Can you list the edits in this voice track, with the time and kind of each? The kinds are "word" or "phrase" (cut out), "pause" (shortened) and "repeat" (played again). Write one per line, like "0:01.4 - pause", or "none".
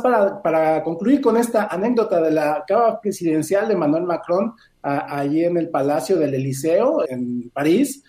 0:07.0 - word